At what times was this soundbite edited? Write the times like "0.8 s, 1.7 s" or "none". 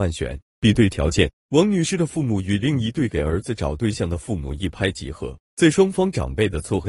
5.4 s